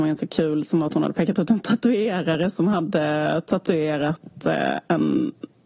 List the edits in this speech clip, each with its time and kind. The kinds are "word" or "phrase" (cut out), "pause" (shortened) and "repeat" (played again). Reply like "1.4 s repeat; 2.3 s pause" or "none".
none